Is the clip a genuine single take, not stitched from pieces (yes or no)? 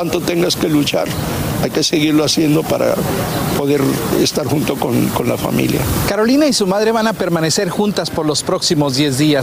yes